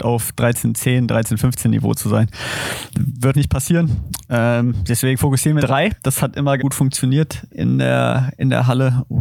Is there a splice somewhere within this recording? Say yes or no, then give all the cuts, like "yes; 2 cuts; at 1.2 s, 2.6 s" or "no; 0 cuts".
yes; 4 cuts; at 3.3 s, 5.6 s, 6.6 s, 7.5 s